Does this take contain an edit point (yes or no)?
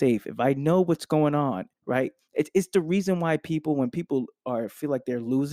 yes